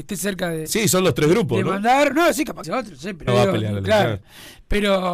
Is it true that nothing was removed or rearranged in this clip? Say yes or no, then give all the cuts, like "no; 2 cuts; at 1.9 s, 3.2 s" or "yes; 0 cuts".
no; 2 cuts; at 2.6 s, 3.3 s